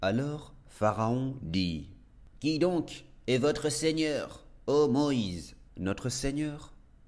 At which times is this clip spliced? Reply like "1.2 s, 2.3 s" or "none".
5.7 s